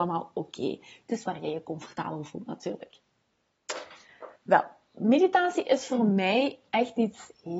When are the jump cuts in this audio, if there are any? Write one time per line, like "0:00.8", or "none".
0:04.4